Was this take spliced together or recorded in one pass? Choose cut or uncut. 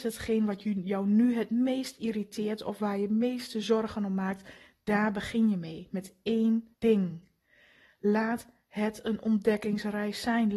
cut